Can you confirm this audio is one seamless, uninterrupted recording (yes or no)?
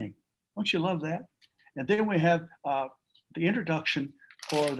yes